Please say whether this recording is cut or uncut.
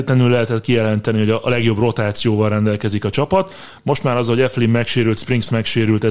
uncut